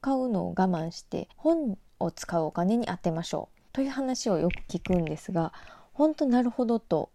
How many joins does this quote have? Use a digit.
2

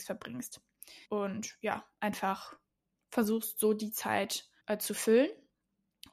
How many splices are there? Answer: 3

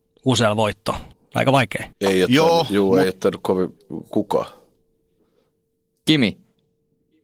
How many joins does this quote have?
2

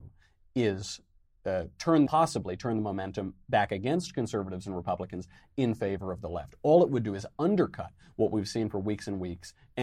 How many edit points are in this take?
1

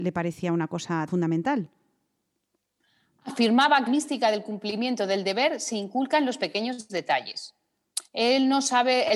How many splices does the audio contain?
2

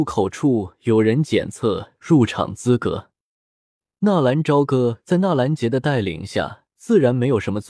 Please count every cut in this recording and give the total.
0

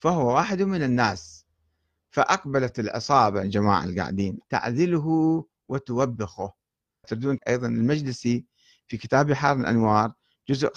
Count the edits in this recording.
4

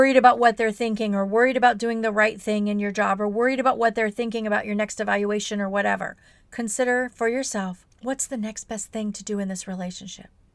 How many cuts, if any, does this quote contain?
2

